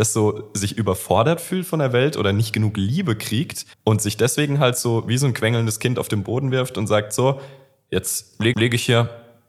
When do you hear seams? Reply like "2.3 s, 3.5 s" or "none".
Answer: 3.7 s, 8.5 s